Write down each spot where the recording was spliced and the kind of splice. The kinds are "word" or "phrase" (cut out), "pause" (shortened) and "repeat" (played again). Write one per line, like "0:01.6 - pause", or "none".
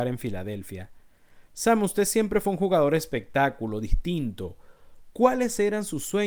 none